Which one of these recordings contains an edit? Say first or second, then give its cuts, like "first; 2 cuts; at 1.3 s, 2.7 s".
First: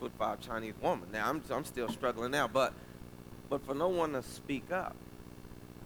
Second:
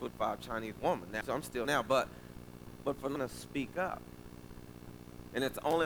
second; 3 cuts; at 1.2 s, 1.6 s, 3.2 s